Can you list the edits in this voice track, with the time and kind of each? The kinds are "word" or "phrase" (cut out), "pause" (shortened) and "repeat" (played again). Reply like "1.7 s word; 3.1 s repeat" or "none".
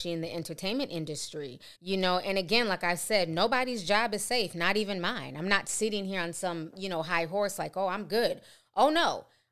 1.7 s pause